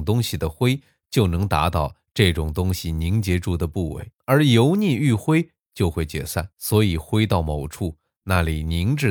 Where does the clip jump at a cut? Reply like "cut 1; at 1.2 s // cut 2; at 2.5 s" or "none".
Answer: cut 1; at 4.2 s // cut 2; at 6.5 s

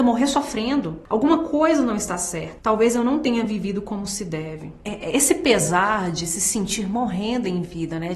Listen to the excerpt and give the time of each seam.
none

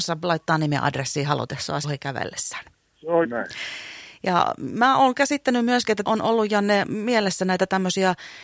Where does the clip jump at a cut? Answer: cut 1; at 1.8 s // cut 2; at 3.2 s // cut 3; at 6.1 s

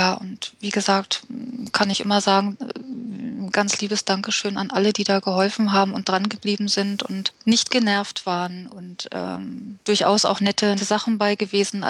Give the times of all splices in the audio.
cut 1; at 3.5 s // cut 2; at 9.8 s // cut 3; at 10.8 s

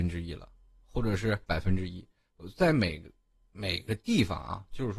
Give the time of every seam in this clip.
cut 1; at 1.4 s

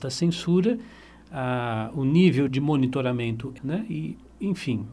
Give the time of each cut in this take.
cut 1; at 2.5 s // cut 2; at 3.6 s

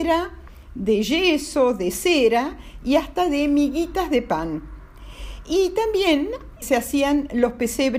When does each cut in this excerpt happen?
cut 1; at 6.6 s

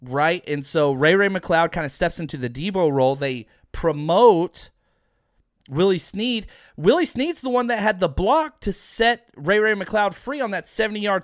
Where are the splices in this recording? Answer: none

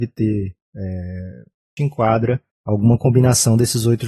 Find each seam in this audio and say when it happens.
cut 1; at 1.8 s // cut 2; at 2.5 s

